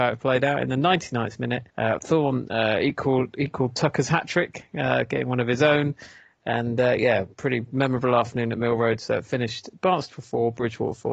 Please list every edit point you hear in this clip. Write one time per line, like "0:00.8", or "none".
0:01.7